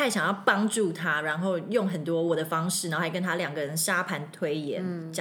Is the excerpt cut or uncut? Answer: uncut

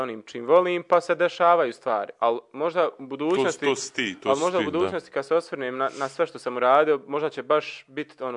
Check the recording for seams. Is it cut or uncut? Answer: uncut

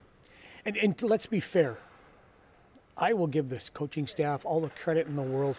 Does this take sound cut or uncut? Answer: uncut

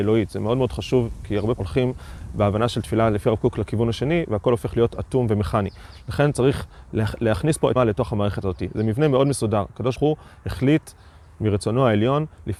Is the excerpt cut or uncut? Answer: cut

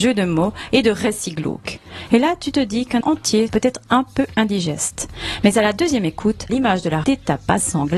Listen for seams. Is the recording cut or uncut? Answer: cut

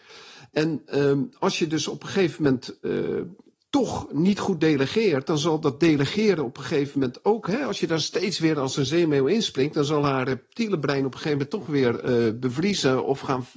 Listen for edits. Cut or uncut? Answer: uncut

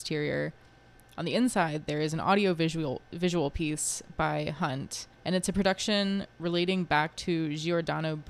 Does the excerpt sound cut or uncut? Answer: cut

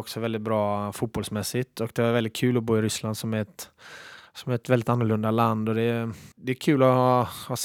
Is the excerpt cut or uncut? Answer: cut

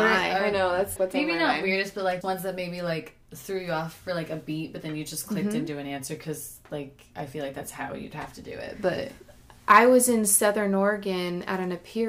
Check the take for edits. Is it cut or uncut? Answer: cut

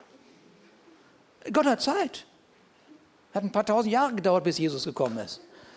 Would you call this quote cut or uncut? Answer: uncut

